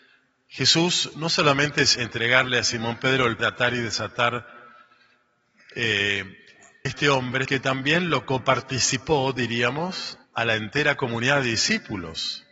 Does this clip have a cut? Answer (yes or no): yes